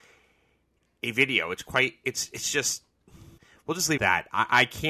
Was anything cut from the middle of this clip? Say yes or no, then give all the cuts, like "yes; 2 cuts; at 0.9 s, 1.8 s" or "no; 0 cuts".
yes; 2 cuts; at 3.4 s, 4.0 s